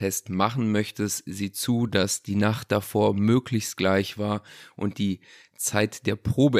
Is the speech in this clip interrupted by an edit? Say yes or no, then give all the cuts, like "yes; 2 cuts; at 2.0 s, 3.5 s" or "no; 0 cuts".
no; 0 cuts